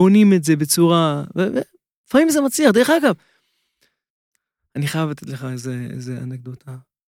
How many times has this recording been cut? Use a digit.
0